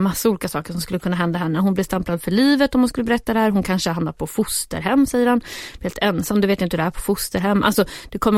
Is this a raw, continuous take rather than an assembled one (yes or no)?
yes